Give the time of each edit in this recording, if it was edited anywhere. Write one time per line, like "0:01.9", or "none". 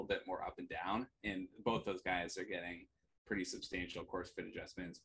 none

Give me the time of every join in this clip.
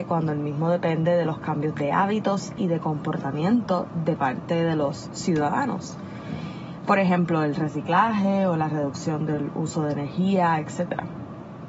none

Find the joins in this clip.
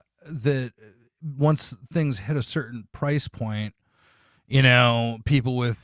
none

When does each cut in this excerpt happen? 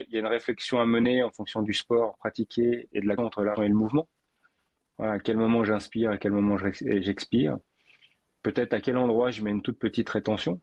0:02.9
0:03.2
0:03.5

